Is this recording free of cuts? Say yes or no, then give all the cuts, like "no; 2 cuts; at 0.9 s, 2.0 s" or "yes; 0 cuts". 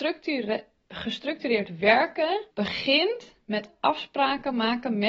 no; 1 cut; at 2.5 s